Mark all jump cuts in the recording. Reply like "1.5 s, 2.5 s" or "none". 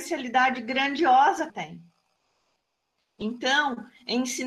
1.5 s